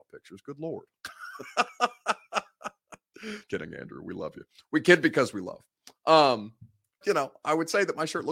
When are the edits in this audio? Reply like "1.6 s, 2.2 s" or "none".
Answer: 3.5 s, 7.0 s